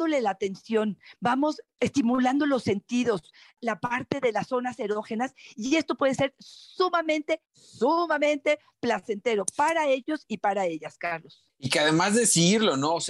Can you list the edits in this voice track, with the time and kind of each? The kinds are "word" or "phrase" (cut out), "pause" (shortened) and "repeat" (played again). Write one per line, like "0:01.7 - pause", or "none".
none